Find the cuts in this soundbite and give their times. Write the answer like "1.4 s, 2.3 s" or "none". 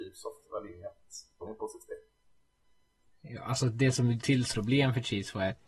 1.4 s, 4.2 s, 4.5 s